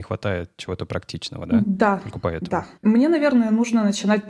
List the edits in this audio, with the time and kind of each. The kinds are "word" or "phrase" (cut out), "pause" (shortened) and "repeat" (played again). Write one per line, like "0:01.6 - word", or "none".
0:02.8 - pause